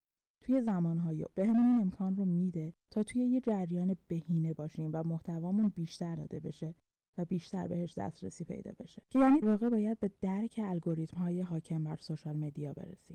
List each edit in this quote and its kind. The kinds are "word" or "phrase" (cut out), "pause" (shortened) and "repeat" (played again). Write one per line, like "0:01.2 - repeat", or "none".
0:01.3 - word
0:02.8 - pause
0:06.2 - word
0:09.0 - pause
0:09.4 - word